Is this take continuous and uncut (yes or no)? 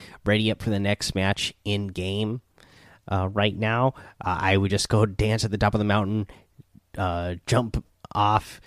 yes